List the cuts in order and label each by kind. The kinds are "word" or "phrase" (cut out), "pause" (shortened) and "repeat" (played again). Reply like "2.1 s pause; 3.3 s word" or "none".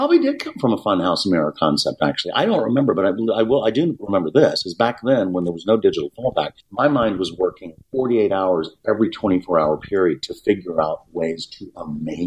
6.6 s pause; 7.8 s pause